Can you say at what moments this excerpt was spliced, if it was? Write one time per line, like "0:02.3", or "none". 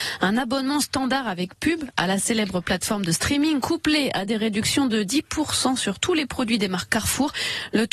none